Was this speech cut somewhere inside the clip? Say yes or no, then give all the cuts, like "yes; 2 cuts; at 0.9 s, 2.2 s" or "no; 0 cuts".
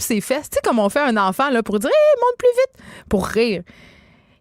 no; 0 cuts